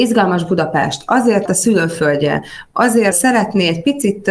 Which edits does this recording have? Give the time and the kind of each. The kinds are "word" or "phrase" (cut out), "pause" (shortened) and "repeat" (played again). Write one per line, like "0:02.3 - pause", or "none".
0:01.5 - word
0:03.1 - word

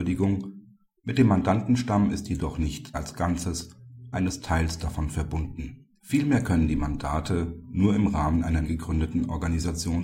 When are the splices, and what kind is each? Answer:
0:02.9 - phrase
0:04.1 - word
0:06.0 - pause
0:08.6 - word

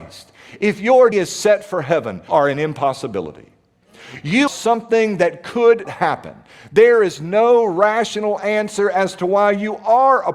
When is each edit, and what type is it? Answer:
0:01.1 - word
0:02.3 - word
0:04.5 - word
0:05.8 - word

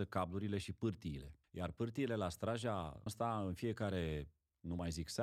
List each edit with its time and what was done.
0:03.1 - word

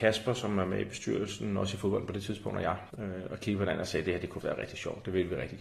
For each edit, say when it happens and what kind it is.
0:02.9 - pause
0:04.4 - word

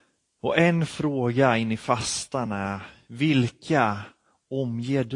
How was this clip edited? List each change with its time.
none

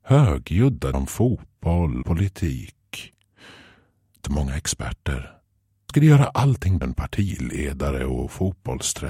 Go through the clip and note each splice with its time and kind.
0:00.9 - word
0:02.0 - word
0:04.2 - word
0:05.9 - word
0:06.8 - word

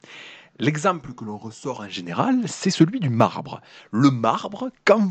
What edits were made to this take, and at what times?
none

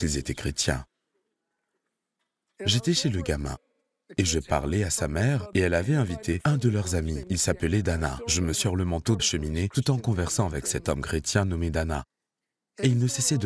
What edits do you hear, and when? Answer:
0:08.5 - phrase
0:09.2 - word

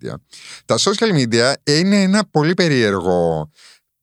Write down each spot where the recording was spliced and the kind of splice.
none

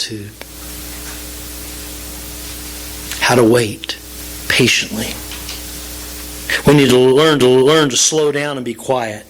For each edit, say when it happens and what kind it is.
0:07.4 - repeat

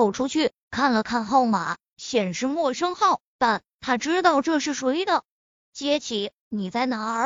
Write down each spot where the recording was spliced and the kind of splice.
0:05.6 - pause

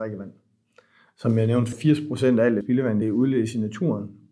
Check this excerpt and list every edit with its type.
0:01.7 - word
0:02.6 - word
0:03.0 - phrase

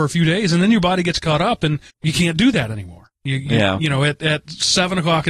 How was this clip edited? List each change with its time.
0:01.9 - pause
0:03.2 - pause

